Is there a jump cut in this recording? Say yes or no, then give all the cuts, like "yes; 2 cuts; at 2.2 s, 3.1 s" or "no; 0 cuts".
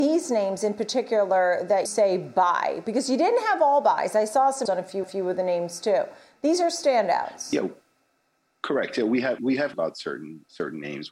yes; 5 cuts; at 1.9 s, 4.7 s, 5.0 s, 9.4 s, 9.7 s